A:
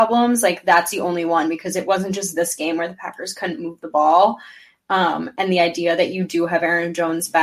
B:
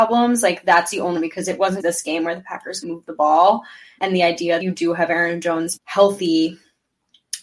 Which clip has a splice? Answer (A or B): B